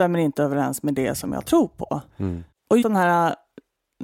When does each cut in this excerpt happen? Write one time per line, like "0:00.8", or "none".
0:02.1
0:02.8